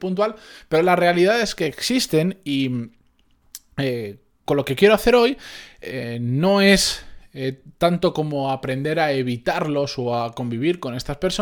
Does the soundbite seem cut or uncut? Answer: uncut